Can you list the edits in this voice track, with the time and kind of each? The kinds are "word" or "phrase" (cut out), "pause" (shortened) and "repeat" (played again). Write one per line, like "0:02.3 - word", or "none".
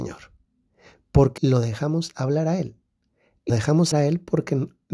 0:01.4 - word
0:03.5 - word
0:03.9 - word